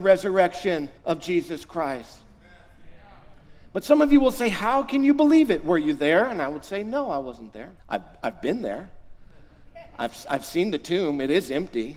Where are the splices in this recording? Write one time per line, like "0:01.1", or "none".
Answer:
0:01.0
0:07.8